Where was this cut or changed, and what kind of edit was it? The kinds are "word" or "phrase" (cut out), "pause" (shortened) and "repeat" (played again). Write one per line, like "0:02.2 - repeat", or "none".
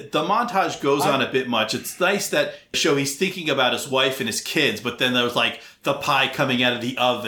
0:02.7 - phrase